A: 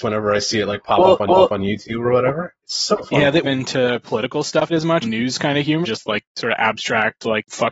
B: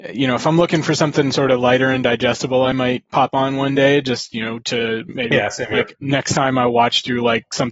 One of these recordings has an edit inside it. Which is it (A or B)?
A